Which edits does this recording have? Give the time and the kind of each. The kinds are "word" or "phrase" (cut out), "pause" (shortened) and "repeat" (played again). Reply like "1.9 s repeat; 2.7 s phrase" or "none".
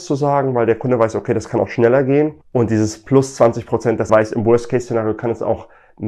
2.4 s pause; 4.1 s word